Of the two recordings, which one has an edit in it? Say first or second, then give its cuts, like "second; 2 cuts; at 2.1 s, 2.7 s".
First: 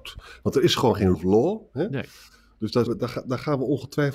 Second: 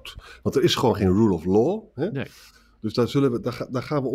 first; 2 cuts; at 1.1 s, 2.9 s